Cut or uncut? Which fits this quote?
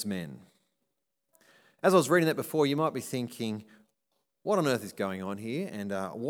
uncut